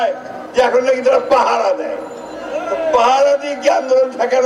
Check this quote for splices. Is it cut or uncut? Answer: uncut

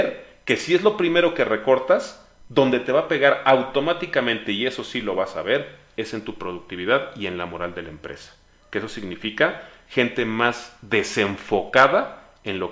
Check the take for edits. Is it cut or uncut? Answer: uncut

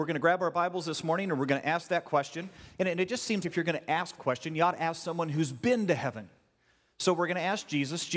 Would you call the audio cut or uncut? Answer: cut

